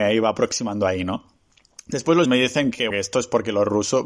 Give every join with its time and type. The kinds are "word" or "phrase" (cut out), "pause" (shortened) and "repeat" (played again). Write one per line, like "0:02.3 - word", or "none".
0:02.3 - word
0:02.9 - word